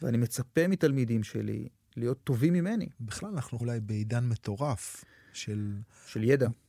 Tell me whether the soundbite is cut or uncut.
cut